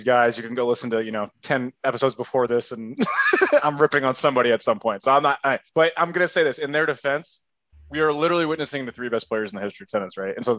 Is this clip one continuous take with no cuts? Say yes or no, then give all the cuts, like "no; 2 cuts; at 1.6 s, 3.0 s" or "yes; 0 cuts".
no; 2 cuts; at 5.7 s, 7.7 s